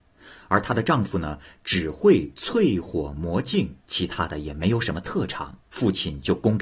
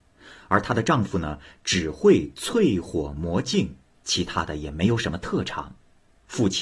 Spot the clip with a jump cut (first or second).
first